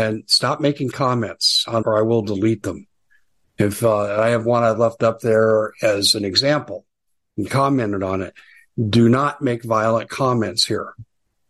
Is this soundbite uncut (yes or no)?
no